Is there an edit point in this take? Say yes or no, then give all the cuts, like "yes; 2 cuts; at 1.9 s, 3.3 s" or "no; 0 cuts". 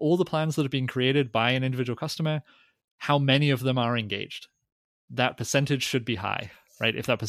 no; 0 cuts